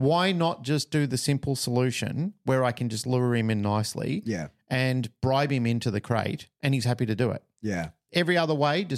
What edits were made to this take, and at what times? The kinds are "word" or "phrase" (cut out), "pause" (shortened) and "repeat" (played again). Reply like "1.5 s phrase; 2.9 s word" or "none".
none